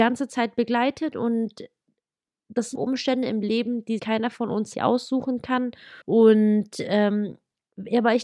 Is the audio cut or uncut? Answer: cut